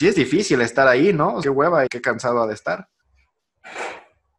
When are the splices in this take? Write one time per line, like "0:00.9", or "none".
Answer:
0:01.4
0:01.9

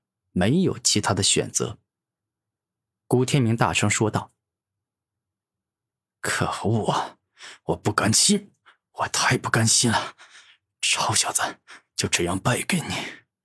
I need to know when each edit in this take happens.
0:01.9

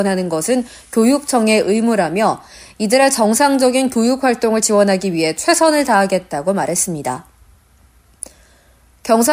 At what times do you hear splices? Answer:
none

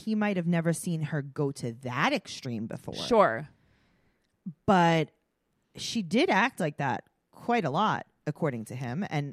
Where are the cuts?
none

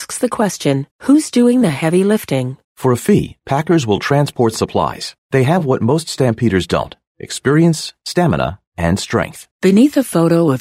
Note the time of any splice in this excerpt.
0:00.9
0:02.6
0:05.2
0:09.5

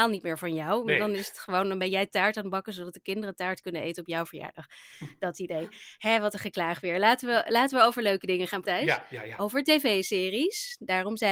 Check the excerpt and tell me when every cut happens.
0:08.6

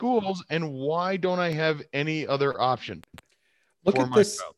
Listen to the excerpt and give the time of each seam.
none

